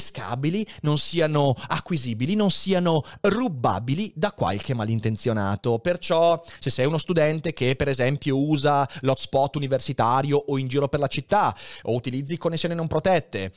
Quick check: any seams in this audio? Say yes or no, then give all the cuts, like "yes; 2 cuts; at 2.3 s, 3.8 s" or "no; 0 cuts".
no; 0 cuts